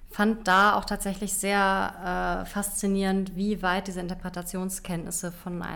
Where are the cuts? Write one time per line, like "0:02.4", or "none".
none